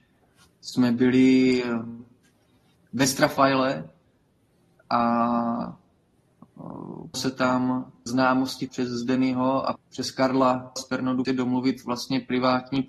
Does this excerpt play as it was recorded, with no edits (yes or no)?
no